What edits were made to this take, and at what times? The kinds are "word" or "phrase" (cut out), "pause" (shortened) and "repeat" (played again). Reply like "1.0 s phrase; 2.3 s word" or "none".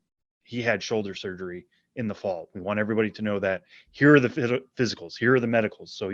none